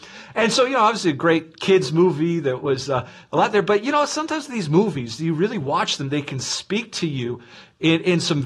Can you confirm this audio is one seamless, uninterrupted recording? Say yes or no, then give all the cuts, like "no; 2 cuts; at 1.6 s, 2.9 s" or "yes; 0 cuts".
yes; 0 cuts